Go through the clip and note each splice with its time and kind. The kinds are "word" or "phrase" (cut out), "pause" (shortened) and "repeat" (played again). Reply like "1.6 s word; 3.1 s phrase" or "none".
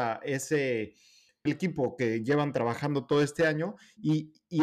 1.5 s phrase